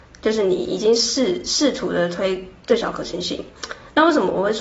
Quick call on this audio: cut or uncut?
uncut